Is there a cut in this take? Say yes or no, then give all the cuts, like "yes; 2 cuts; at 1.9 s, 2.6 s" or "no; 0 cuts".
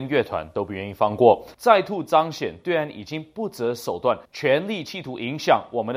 yes; 2 cuts; at 1.5 s, 4.2 s